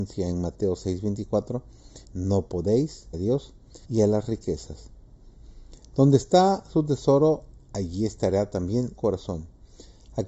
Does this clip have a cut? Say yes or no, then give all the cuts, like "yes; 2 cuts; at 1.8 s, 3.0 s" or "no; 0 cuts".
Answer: yes; 5 cuts; at 2.0 s, 3.1 s, 3.8 s, 7.6 s, 9.0 s